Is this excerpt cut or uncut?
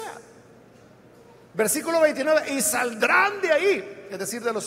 uncut